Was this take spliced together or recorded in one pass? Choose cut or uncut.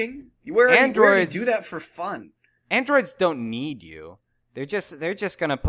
uncut